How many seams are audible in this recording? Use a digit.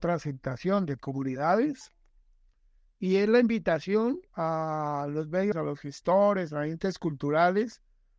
3